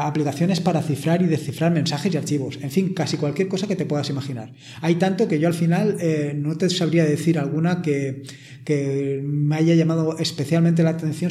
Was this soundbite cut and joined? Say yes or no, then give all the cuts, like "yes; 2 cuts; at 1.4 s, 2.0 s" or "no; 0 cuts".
no; 0 cuts